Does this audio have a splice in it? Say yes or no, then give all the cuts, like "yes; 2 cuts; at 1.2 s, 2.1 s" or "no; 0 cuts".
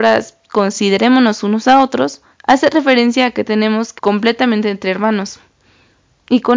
yes; 2 cuts; at 2.3 s, 4.0 s